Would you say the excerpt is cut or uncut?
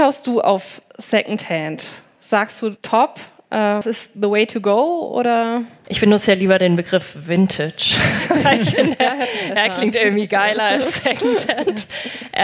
cut